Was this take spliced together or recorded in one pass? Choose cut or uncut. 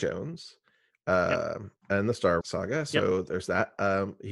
cut